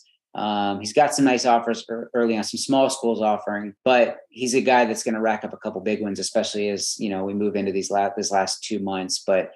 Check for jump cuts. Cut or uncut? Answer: cut